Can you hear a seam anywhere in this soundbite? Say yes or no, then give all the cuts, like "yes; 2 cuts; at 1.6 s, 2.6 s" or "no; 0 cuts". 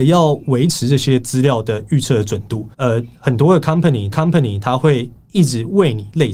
yes; 2 cuts; at 2.7 s, 4.1 s